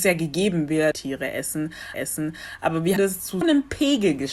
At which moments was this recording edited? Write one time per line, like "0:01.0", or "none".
0:00.9
0:01.9
0:03.0
0:03.4